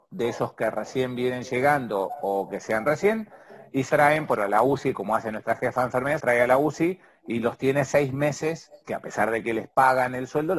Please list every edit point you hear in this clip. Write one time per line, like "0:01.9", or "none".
0:02.8
0:03.9
0:04.4
0:06.2
0:08.8